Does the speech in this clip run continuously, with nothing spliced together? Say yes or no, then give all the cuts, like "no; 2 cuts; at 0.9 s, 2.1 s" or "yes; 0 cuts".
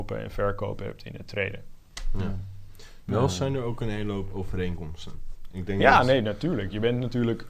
yes; 0 cuts